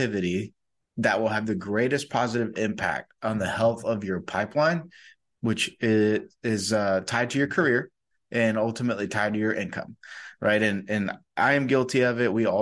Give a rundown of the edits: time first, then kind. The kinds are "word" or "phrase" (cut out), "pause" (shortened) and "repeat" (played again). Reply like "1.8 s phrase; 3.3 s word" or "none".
none

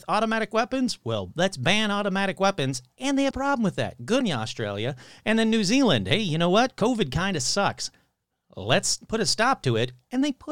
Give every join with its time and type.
3.3 s word; 4.2 s word

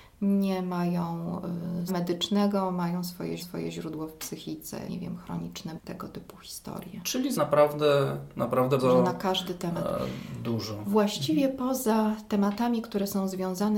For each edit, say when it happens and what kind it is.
1.9 s phrase; 3.4 s repeat; 4.9 s word; 5.8 s phrase; 7.3 s phrase; 8.8 s word

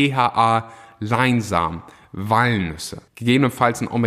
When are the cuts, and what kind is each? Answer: 3.1 s pause

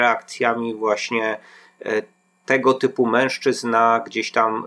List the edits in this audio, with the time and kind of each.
none

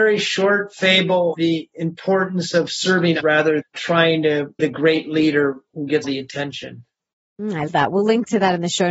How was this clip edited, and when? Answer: 1.3 s word; 3.2 s word; 3.6 s word; 4.6 s word; 6.0 s word; 7.7 s word

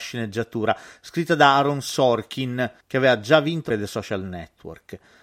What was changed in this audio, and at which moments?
3.7 s word

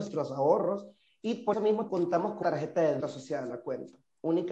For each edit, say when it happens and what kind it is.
1.5 s word; 1.9 s word; 2.4 s word; 3.0 s word

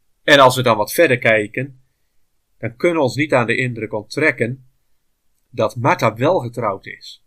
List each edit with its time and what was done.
none

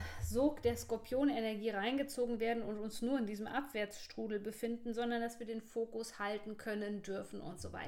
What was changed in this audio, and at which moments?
none

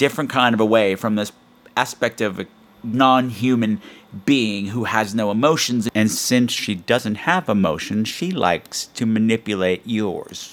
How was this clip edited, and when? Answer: none

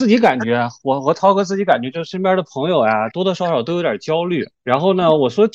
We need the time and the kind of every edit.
3.1 s phrase

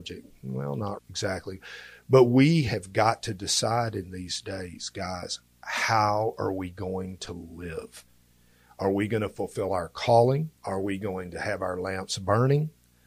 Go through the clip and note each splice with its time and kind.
1.0 s word; 10.6 s pause

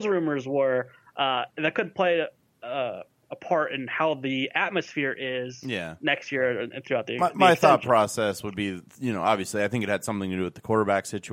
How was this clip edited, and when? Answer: none

